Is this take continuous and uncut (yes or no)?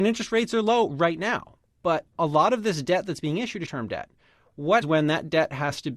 no